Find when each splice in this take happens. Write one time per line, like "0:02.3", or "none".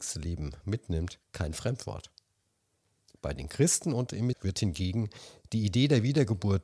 0:01.2
0:04.3